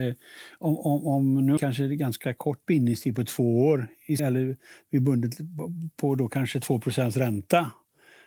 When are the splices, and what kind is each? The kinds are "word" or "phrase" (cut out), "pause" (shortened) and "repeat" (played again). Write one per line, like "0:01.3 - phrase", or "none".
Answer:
0:01.6 - phrase
0:04.2 - word